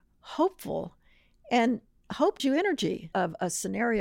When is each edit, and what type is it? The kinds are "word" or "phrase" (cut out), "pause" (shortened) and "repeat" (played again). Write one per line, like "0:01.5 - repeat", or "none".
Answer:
0:02.4 - word
0:03.1 - word